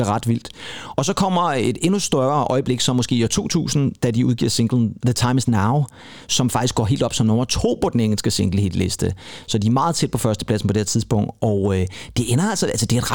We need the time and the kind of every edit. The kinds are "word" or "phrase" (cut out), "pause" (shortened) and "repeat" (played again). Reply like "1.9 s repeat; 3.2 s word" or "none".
none